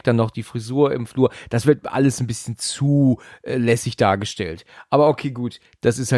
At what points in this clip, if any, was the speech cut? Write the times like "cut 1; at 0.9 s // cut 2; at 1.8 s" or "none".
none